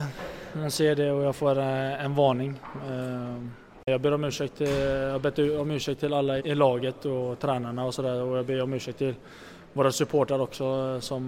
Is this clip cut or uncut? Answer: cut